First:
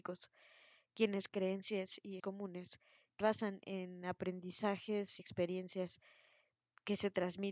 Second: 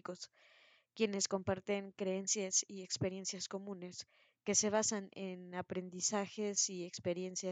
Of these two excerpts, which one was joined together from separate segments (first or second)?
first